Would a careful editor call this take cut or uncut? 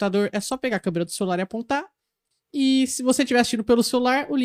uncut